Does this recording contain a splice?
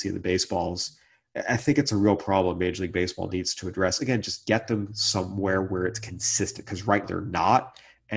yes; 1 cut; at 7.0 s

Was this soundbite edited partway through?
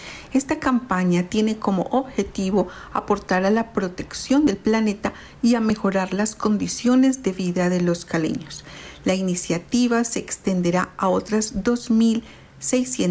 no; 0 cuts

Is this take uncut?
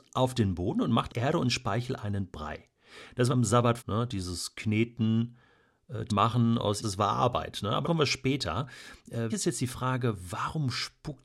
no; 7 cuts; at 1.1 s, 3.3 s, 3.8 s, 6.1 s, 6.8 s, 7.8 s, 9.3 s

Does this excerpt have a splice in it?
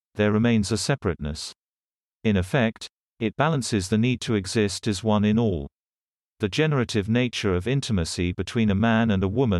no; 0 cuts

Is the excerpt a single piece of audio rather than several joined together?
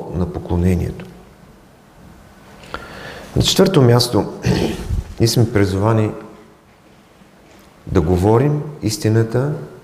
yes; 0 cuts

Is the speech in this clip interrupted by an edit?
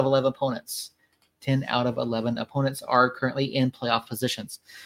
no; 0 cuts

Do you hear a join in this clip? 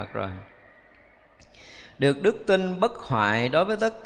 no; 0 cuts

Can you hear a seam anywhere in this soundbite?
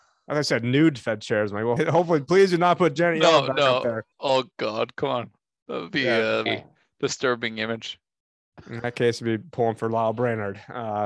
yes; 3 cuts; at 1.8 s, 4.1 s, 6.5 s

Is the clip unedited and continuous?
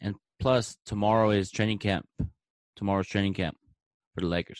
yes; 0 cuts

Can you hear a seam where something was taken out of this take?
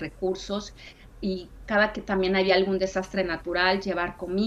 no; 0 cuts

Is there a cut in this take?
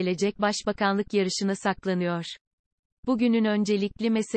no; 0 cuts

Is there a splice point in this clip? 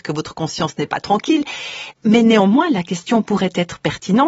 no; 0 cuts

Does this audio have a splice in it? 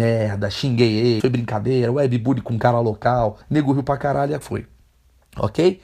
yes; 3 cuts; at 1.2 s, 3.4 s, 4.4 s

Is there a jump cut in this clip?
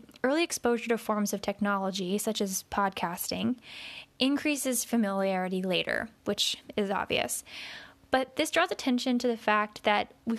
no; 0 cuts

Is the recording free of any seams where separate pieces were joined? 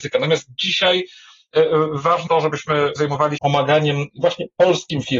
no; 3 cuts; at 2.3 s, 3.0 s, 3.4 s

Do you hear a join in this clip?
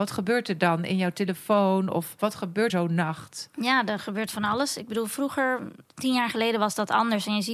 yes; 2 cuts; at 2.7 s, 5.9 s

